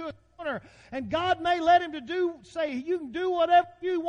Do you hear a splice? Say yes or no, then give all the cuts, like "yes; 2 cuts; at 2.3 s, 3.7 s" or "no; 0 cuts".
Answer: no; 0 cuts